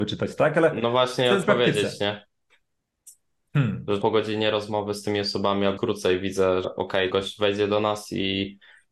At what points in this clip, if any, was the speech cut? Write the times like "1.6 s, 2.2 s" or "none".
1.4 s, 4.0 s, 5.8 s, 6.6 s, 7.1 s